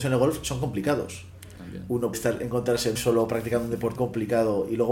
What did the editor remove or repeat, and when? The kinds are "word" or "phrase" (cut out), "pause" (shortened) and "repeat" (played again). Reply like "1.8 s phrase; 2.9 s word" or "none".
2.1 s word; 3.0 s word; 4.0 s word